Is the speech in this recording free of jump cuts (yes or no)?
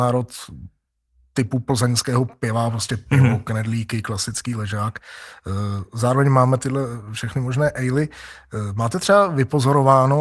yes